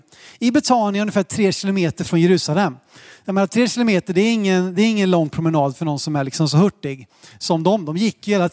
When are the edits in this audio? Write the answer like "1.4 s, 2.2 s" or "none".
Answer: none